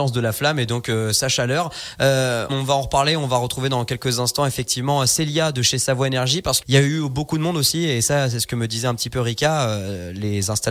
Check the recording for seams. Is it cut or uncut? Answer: cut